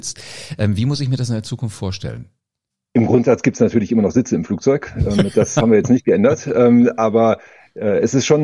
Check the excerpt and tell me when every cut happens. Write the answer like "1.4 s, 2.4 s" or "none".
2.7 s